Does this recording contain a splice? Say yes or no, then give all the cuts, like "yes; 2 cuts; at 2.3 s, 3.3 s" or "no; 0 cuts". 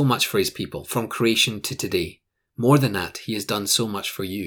no; 0 cuts